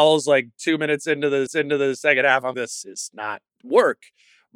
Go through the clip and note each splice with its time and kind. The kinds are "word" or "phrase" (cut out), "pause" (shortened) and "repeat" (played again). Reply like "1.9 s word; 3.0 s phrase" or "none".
1.5 s repeat; 2.5 s word; 3.5 s word